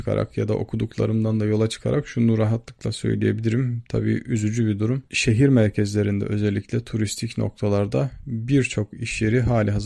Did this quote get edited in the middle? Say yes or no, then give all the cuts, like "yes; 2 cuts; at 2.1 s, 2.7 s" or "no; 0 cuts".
yes; 1 cut; at 5.1 s